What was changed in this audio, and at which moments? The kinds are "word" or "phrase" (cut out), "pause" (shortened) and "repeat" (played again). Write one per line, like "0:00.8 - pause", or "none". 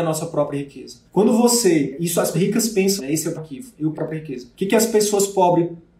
0:01.1 - pause
0:02.3 - word
0:03.0 - word
0:03.4 - word
0:03.9 - phrase
0:04.5 - pause